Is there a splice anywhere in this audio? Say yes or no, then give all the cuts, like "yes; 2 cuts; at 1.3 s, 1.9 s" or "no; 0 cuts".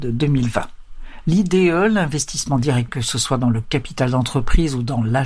yes; 1 cut; at 2.9 s